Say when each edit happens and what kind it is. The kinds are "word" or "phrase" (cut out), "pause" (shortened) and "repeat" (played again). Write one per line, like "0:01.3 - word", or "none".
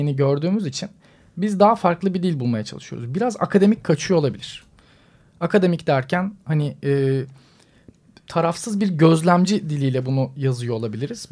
none